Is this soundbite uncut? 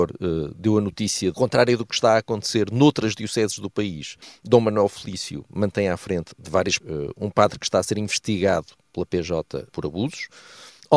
no; 5 cuts; at 1.3 s, 4.2 s, 6.3 s, 6.8 s, 9.7 s

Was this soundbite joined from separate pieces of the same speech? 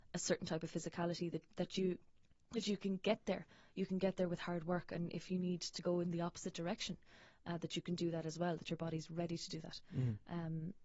no; 0 cuts

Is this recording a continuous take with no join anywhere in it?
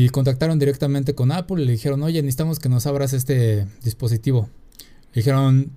yes; 0 cuts

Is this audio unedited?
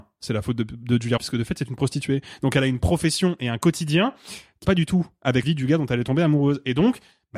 no; 3 cuts; at 1.2 s, 4.6 s, 5.4 s

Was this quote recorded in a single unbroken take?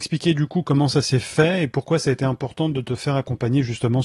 yes; 0 cuts

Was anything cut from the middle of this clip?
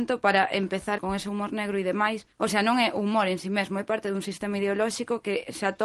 yes; 2 cuts; at 1.0 s, 2.3 s

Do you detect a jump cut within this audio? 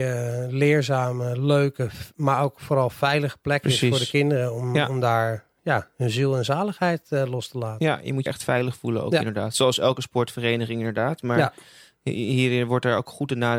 yes; 1 cut; at 8.3 s

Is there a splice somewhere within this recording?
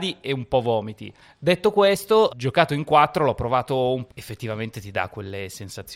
yes; 3 cuts; at 1.2 s, 2.3 s, 4.1 s

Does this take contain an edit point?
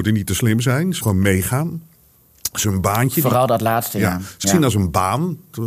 yes; 3 cuts; at 1.0 s, 2.6 s, 4.4 s

